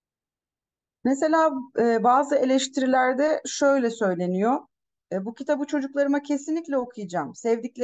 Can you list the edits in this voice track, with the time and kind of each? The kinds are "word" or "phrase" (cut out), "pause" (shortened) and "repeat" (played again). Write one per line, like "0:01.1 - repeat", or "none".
none